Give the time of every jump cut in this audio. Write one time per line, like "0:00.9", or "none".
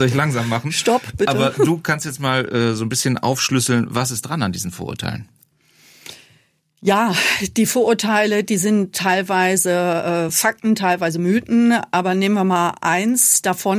none